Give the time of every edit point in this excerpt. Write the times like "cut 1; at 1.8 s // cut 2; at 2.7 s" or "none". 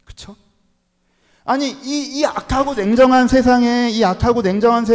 none